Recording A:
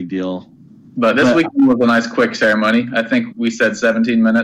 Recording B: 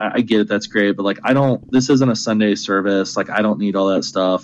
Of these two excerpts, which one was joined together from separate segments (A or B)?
A